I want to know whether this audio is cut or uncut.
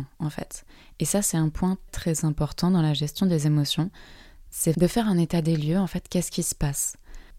cut